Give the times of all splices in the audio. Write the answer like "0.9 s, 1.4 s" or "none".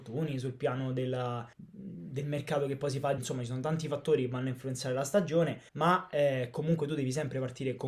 1.5 s, 3.2 s, 5.7 s